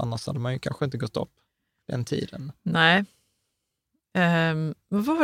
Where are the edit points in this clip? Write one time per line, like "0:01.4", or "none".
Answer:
none